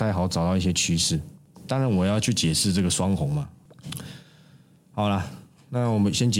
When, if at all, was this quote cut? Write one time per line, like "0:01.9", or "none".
none